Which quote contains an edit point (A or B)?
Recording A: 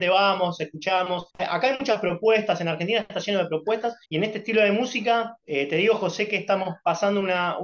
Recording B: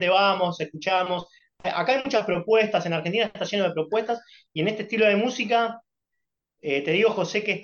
A